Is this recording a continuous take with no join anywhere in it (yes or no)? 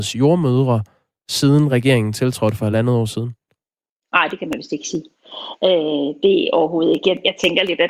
yes